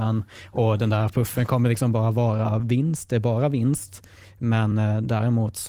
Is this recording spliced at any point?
no; 0 cuts

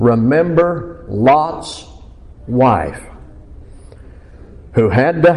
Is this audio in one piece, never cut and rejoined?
yes; 0 cuts

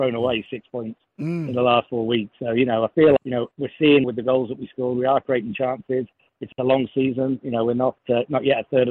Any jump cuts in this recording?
yes; 3 cuts; at 3.2 s, 3.5 s, 4.0 s

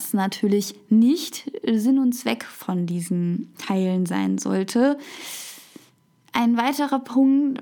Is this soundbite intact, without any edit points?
yes; 0 cuts

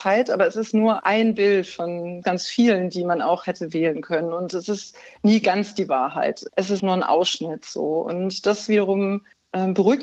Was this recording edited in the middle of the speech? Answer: yes; 2 cuts; at 2.2 s, 6.8 s

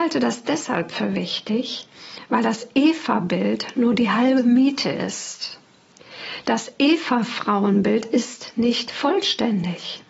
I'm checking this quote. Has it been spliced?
no; 0 cuts

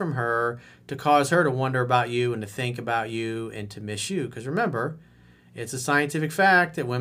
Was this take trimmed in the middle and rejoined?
no; 0 cuts

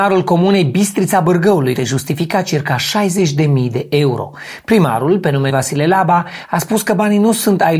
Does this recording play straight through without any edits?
no; 2 cuts; at 1.8 s, 5.5 s

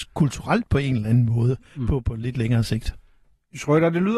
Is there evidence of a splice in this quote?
no; 0 cuts

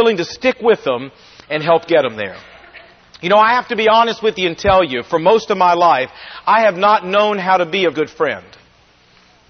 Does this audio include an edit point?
yes; 1 cut; at 7.9 s

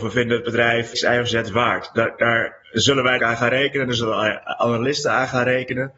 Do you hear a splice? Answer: yes; 3 cuts; at 0.9 s, 2.6 s, 3.2 s

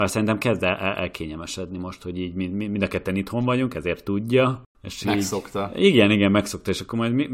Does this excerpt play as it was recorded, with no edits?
yes; 0 cuts

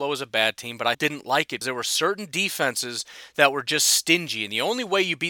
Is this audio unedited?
no; 2 cuts; at 0.9 s, 1.6 s

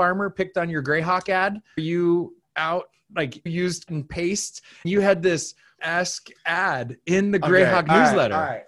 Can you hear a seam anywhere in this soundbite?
yes; 6 cuts; at 1.8 s, 2.4 s, 3.5 s, 3.9 s, 4.8 s, 5.8 s

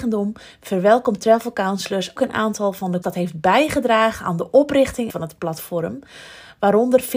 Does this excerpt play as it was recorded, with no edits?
no; 3 cuts; at 2.2 s, 3.0 s, 5.1 s

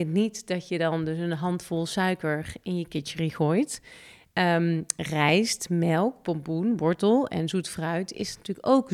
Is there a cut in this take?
no; 0 cuts

